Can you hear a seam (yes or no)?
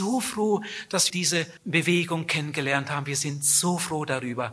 yes